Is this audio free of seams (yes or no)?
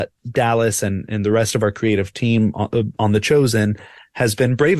yes